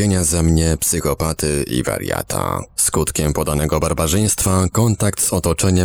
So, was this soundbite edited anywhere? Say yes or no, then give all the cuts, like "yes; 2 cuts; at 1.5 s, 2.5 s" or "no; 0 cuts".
no; 0 cuts